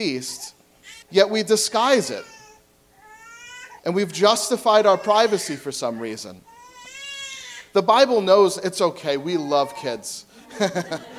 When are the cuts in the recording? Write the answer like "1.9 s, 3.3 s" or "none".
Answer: 1.0 s, 3.8 s

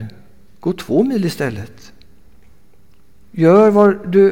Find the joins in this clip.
none

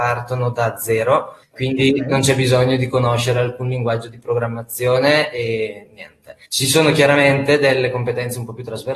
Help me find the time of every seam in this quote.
1.4 s, 6.4 s

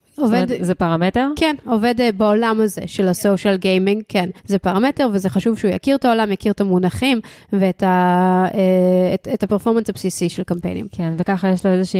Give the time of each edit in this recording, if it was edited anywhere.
4.4 s

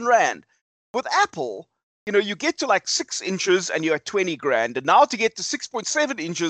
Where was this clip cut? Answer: none

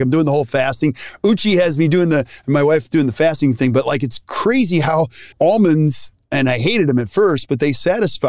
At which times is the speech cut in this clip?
5.3 s

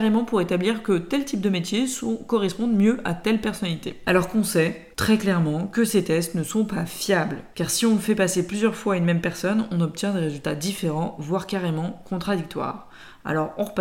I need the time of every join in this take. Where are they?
4.9 s

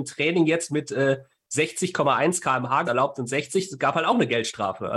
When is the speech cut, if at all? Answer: 2.8 s

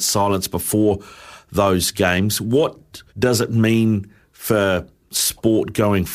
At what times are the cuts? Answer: 3.1 s

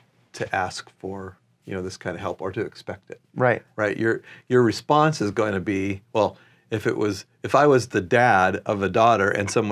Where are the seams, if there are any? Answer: none

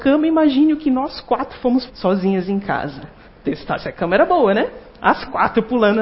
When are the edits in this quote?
1.9 s, 3.3 s

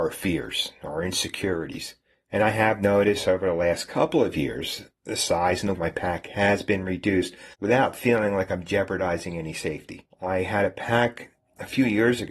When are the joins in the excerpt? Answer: 4.9 s, 5.7 s, 7.5 s

